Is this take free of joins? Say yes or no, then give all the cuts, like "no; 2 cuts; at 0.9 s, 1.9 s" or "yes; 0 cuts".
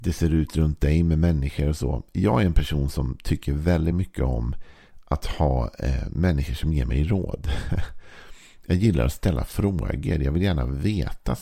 yes; 0 cuts